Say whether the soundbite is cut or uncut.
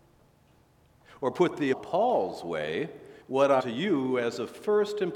cut